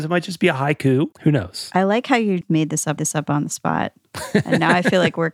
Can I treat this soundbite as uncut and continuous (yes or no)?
no